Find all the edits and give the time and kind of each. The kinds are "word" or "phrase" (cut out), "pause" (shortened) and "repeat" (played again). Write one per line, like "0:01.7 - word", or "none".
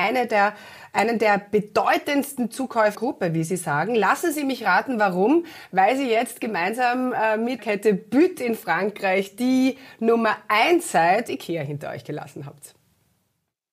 0:02.9 - word
0:07.6 - word
0:11.3 - word